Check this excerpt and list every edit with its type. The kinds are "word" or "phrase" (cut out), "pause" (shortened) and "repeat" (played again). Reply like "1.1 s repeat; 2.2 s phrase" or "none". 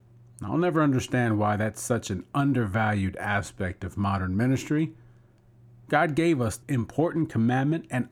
6.6 s word